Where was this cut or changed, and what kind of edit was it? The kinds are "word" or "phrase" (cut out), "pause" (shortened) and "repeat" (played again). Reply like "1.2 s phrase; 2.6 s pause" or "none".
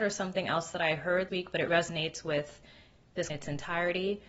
1.3 s word; 1.7 s word; 3.3 s word